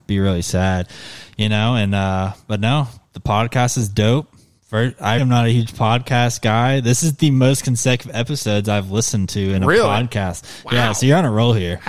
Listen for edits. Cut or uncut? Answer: cut